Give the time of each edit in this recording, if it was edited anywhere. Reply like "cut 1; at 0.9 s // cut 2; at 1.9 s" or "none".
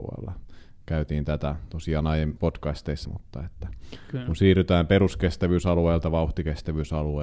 cut 1; at 2.4 s // cut 2; at 3.0 s